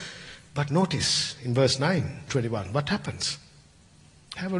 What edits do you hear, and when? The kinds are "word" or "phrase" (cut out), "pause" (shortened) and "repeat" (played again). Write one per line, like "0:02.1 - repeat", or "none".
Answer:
0:02.3 - word